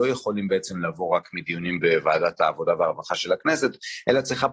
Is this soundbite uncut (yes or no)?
yes